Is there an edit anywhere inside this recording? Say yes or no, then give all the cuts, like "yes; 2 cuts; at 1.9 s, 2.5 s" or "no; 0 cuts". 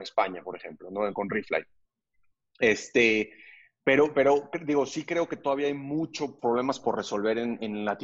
yes; 1 cut; at 6.4 s